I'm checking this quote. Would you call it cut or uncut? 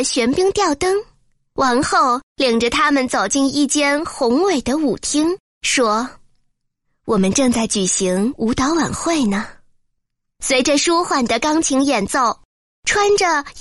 uncut